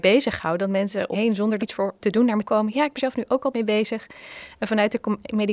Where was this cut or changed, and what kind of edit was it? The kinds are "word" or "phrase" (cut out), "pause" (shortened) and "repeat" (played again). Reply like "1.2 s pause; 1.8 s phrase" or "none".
1.1 s word; 1.6 s phrase; 2.0 s word; 2.4 s word; 3.0 s word; 3.5 s word